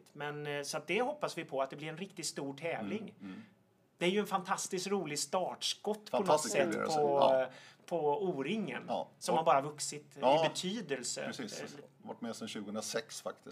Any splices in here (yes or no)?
no